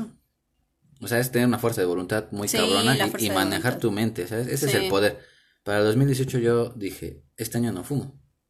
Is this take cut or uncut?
uncut